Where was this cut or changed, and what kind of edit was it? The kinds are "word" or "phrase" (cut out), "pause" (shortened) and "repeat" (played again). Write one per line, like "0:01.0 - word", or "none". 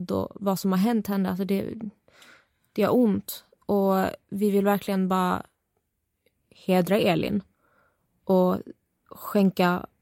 none

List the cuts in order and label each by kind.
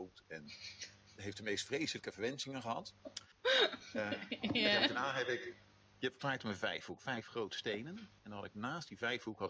0:03.0 - pause
0:06.2 - word

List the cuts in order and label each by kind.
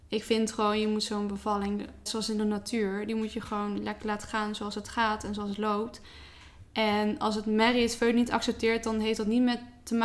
0:02.1 - word

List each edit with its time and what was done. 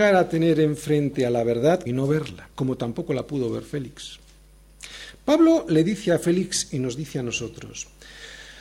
0:01.9 - phrase
0:02.5 - pause

